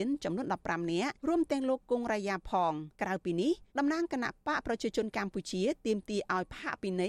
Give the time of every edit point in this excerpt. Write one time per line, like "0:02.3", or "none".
0:01.2
0:02.9
0:03.7